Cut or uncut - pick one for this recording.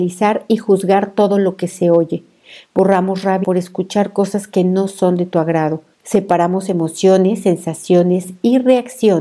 cut